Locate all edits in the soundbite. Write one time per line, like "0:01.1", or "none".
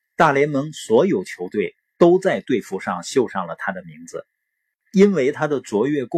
none